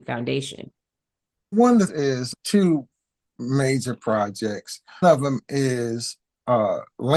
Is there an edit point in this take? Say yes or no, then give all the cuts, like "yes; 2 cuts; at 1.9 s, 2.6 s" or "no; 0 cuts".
yes; 4 cuts; at 1.5 s, 1.9 s, 2.3 s, 5.0 s